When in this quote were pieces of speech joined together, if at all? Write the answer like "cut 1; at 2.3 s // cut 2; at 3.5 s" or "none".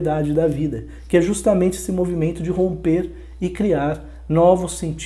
none